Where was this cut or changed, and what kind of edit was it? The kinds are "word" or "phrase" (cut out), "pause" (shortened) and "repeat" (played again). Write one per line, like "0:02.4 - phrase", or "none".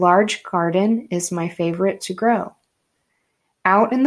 0:02.0 - word